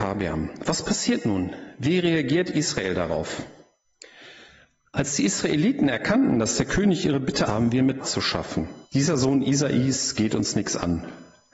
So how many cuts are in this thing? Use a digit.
3